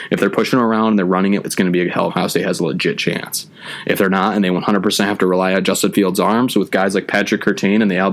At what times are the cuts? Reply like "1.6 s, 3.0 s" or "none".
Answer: 1.4 s, 2.1 s